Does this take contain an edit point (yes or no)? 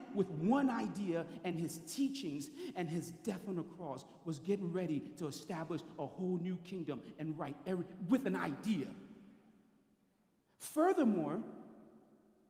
no